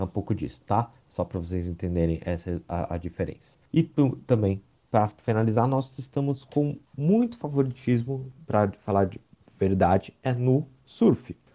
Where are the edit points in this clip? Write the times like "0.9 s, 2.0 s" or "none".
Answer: 3.7 s, 6.8 s